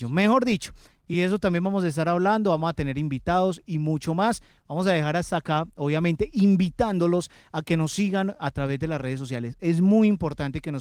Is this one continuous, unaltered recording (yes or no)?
yes